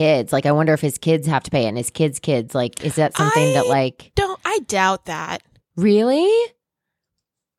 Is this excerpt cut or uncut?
uncut